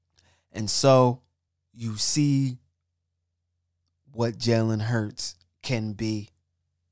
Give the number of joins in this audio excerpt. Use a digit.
1